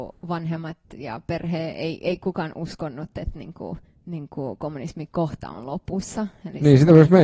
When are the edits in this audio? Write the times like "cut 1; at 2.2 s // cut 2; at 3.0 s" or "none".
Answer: cut 1; at 3.9 s